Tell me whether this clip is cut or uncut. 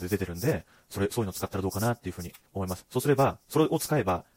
cut